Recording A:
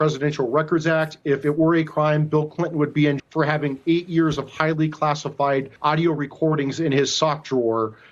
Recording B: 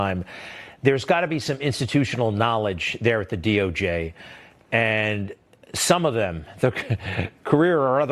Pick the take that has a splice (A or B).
A